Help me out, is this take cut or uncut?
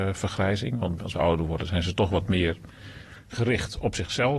cut